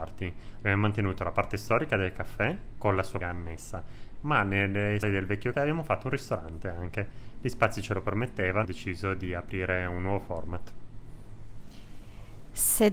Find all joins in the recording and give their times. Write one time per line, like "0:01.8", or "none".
0:03.2
0:05.0
0:05.5
0:08.6

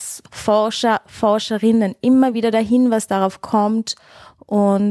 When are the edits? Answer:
none

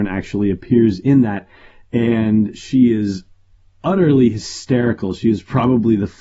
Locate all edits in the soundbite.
none

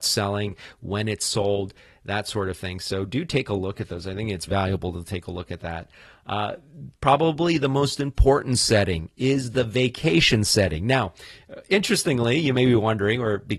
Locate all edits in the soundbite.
0:04.5

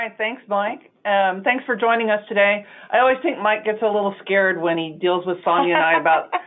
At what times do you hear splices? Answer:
none

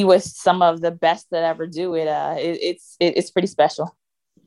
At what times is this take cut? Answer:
none

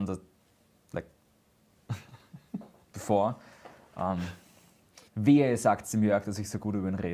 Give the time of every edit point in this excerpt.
0:05.1

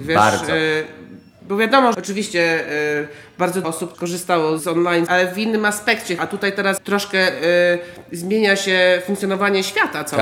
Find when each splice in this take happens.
0:01.9
0:03.6
0:03.9
0:04.6
0:05.1
0:06.2
0:06.8

